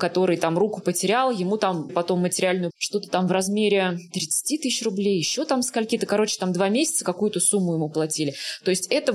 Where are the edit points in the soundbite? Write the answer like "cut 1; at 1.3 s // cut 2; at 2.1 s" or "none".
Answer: cut 1; at 1.9 s // cut 2; at 2.7 s